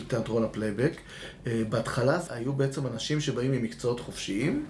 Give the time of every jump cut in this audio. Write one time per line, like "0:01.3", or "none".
0:02.3